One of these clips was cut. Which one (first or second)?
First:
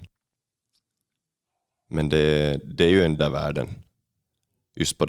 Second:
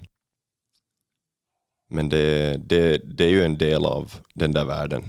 first